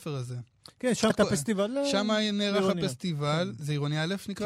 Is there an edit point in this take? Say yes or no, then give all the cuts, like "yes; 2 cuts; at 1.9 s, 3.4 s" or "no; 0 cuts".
yes; 1 cut; at 1.1 s